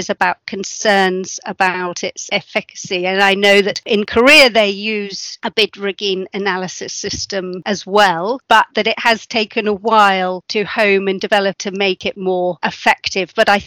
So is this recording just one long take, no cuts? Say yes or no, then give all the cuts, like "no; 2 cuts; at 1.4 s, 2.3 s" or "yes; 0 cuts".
yes; 0 cuts